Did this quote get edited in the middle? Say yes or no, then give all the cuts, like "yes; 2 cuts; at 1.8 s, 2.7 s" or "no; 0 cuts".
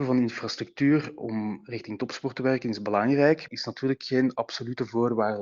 yes; 1 cut; at 3.5 s